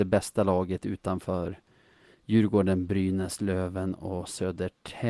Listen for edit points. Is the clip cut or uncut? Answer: uncut